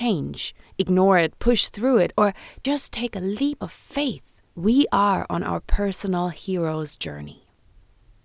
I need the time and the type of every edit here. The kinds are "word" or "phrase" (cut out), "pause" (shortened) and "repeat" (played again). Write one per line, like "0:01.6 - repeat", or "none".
0:04.5 - pause